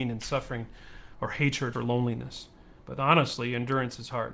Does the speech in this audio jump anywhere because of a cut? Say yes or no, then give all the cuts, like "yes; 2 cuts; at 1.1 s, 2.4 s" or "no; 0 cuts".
yes; 2 cuts; at 1.7 s, 2.8 s